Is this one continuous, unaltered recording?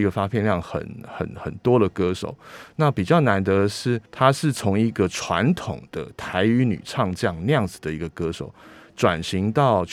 no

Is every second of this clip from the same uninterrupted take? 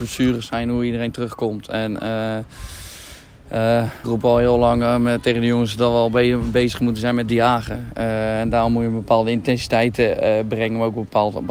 no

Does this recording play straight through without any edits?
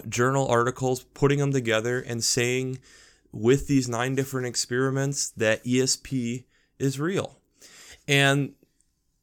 yes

